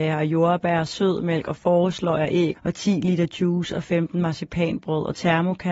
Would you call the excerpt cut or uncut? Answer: cut